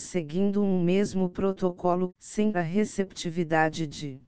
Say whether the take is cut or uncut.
cut